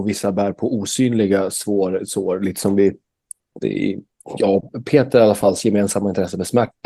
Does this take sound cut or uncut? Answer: uncut